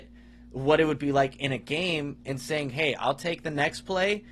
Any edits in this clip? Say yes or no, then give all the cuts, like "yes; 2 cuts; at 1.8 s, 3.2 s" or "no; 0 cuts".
no; 0 cuts